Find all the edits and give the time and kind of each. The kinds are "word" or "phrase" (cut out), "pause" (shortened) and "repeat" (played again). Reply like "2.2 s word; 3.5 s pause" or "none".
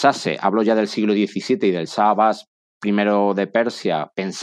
none